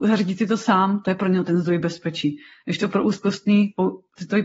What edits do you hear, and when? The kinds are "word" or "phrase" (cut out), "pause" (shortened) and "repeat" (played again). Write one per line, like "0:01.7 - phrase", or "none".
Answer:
none